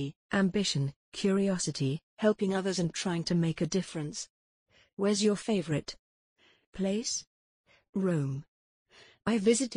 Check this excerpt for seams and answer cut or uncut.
uncut